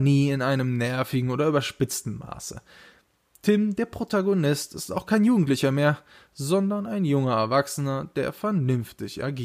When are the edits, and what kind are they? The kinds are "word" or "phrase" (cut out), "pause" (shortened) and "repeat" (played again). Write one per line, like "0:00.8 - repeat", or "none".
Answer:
none

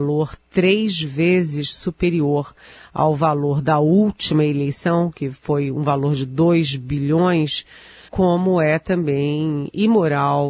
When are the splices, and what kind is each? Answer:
0:08.1 - word

